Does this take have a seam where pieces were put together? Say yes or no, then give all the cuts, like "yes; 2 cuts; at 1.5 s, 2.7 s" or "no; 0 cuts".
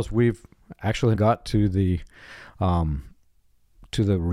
yes; 1 cut; at 1.1 s